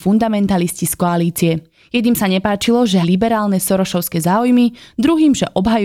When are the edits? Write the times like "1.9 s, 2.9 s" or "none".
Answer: 3.0 s